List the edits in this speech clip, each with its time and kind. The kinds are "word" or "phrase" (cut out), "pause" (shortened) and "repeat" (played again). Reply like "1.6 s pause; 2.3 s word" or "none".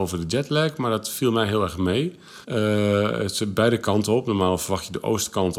2.4 s pause

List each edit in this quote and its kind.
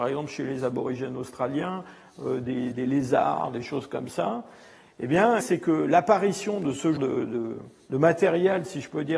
2.7 s word; 5.4 s word; 7.0 s word

